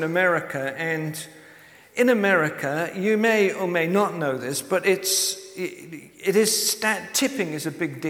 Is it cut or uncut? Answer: uncut